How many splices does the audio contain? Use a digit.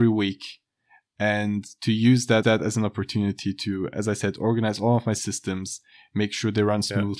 1